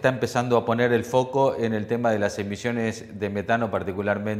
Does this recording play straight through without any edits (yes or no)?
yes